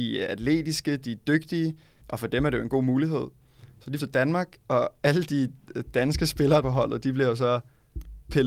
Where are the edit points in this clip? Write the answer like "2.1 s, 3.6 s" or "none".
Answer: 2.0 s, 4.0 s, 6.6 s